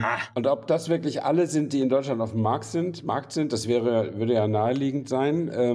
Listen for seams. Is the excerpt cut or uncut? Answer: uncut